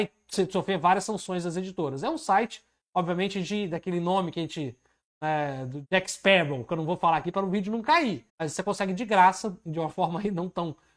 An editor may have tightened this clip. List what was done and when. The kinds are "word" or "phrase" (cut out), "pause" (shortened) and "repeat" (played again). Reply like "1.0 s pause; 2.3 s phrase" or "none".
8.3 s pause